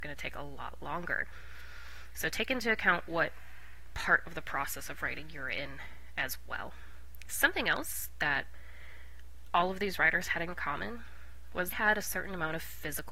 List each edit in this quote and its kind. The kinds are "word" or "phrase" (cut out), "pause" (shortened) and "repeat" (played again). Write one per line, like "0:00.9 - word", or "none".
0:11.7 - word